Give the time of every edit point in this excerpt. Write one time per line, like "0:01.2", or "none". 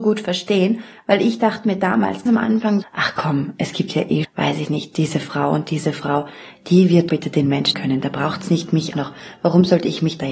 0:02.3
0:02.8
0:04.2
0:07.1
0:07.7
0:08.9